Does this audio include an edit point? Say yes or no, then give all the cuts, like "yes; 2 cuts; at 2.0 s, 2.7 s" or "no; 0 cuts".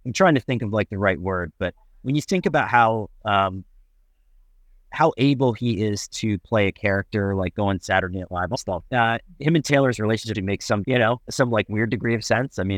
yes; 4 cuts; at 8.5 s, 8.9 s, 10.3 s, 10.8 s